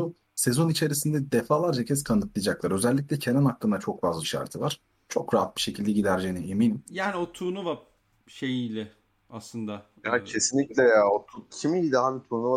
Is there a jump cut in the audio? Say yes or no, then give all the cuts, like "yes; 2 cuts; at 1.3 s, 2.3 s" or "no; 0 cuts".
yes; 2 cuts; at 4.2 s, 11.5 s